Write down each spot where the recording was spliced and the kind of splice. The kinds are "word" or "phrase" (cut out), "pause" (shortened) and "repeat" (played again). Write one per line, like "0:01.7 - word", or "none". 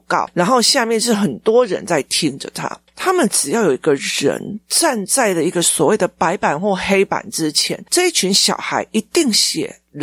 none